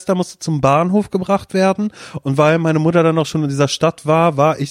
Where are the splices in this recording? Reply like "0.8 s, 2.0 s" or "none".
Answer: none